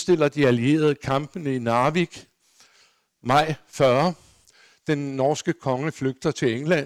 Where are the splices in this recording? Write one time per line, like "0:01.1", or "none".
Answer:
none